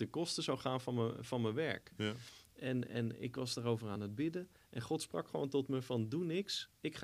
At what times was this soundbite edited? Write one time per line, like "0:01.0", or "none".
none

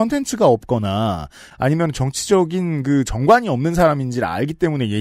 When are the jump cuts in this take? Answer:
none

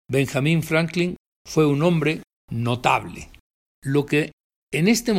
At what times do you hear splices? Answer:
none

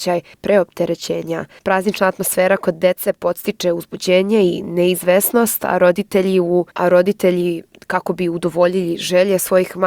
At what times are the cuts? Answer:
0:06.7
0:07.7

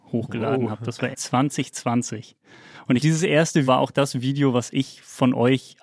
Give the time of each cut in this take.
0:01.1
0:03.0
0:03.7

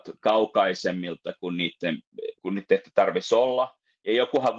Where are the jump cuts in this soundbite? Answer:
0:02.4

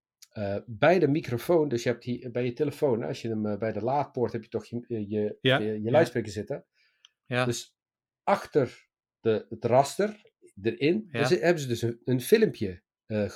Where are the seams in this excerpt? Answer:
none

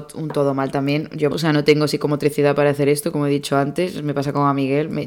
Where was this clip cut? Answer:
0:01.3

